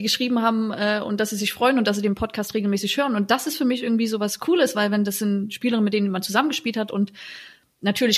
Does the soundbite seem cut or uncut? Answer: uncut